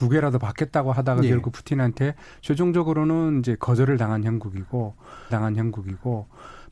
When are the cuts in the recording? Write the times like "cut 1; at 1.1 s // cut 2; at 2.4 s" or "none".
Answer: cut 1; at 5.3 s

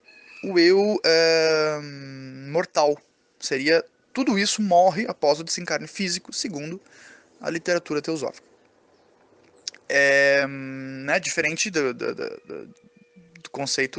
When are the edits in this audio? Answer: none

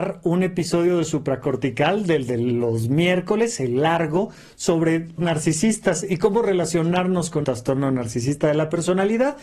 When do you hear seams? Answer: cut 1; at 5.2 s // cut 2; at 7.4 s

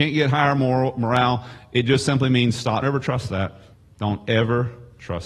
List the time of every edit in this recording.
cut 1; at 2.8 s // cut 2; at 3.7 s

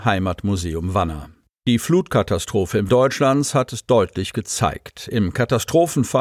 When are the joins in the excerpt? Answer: cut 1; at 1.5 s // cut 2; at 2.9 s

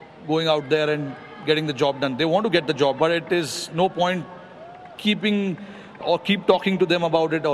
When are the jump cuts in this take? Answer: cut 1; at 3.0 s // cut 2; at 6.0 s

